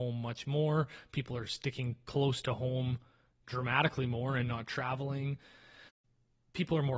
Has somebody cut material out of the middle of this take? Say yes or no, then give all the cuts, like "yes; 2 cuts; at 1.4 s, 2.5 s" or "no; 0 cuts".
no; 0 cuts